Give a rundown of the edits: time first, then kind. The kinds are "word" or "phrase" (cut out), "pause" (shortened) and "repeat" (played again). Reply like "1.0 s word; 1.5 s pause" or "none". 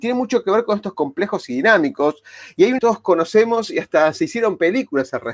0.9 s word; 2.8 s phrase